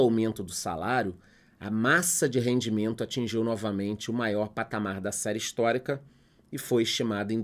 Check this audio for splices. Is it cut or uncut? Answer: uncut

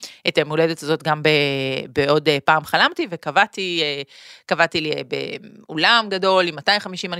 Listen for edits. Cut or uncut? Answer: uncut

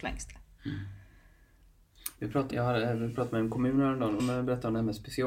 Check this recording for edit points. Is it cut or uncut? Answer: cut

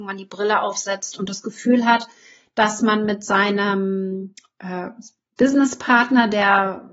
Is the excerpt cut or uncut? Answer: uncut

